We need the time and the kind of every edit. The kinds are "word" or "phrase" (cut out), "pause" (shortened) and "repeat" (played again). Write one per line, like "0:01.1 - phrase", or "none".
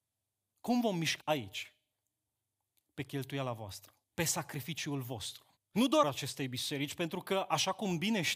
0:01.2 - phrase
0:04.0 - pause
0:05.6 - pause
0:06.0 - phrase